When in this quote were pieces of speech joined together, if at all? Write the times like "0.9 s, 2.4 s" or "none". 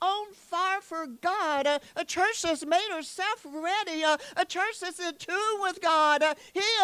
none